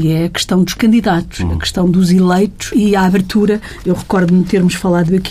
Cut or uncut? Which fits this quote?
cut